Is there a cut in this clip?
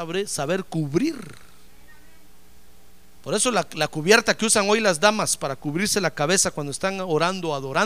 no; 0 cuts

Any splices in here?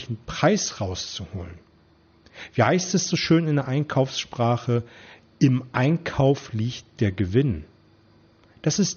no; 0 cuts

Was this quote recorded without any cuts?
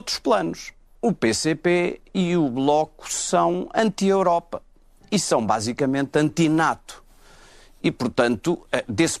yes; 0 cuts

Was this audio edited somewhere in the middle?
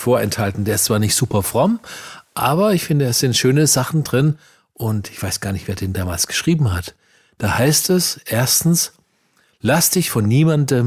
no; 0 cuts

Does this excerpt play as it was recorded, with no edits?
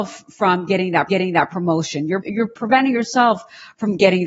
no; 2 cuts; at 1.1 s, 2.2 s

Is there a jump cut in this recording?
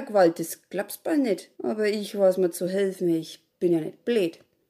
yes; 1 cut; at 1.5 s

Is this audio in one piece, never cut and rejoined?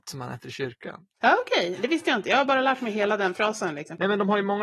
yes; 0 cuts

